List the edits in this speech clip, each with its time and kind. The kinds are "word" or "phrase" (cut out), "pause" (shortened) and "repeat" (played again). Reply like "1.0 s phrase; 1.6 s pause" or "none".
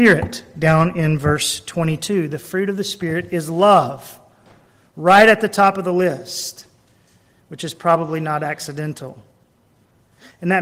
none